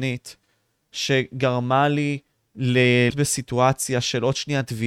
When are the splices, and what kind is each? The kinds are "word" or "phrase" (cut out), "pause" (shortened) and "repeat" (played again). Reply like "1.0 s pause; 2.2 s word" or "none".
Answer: 3.1 s word